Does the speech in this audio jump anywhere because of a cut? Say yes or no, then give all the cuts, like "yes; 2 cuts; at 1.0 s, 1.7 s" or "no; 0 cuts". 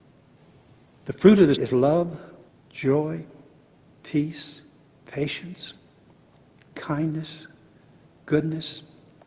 yes; 3 cuts; at 1.5 s, 2.5 s, 4.9 s